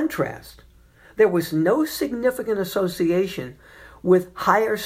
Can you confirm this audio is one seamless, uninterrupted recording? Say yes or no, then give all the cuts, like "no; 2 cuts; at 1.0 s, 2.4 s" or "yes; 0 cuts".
yes; 0 cuts